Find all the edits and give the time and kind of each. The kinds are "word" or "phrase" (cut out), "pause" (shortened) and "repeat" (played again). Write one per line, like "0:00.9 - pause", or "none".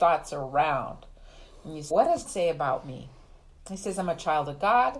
0:01.9 - word
0:02.3 - word